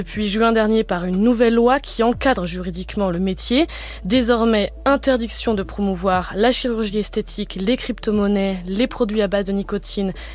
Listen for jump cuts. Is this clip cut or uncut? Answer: uncut